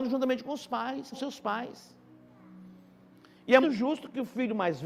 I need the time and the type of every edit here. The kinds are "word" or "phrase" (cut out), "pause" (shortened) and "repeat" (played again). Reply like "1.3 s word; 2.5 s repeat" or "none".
1.1 s word; 3.6 s word